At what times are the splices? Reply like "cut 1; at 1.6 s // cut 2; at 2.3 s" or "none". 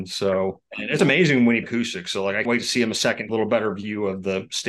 cut 1; at 1.0 s // cut 2; at 1.6 s // cut 3; at 2.4 s // cut 4; at 3.3 s